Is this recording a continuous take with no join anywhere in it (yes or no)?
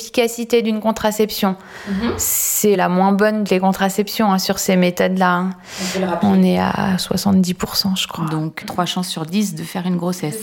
no